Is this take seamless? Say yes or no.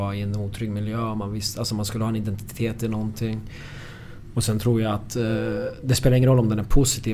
yes